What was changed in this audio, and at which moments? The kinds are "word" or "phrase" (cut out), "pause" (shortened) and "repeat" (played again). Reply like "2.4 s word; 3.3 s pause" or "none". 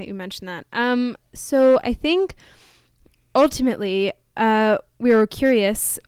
none